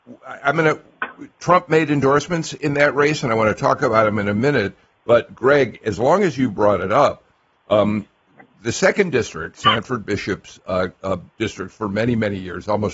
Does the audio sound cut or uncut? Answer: uncut